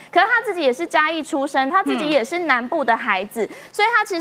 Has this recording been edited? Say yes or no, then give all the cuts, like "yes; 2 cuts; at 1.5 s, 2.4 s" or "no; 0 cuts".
yes; 1 cut; at 1.7 s